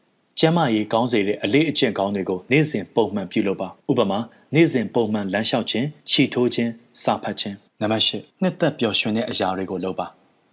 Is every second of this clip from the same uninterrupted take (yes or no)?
no